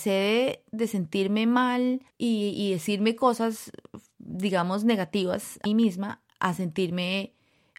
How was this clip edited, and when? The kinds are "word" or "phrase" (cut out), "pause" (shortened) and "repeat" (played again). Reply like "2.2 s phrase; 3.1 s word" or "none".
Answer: 2.1 s pause; 5.7 s word